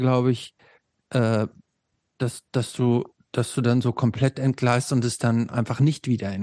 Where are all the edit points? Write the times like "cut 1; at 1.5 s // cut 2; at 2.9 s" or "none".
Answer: none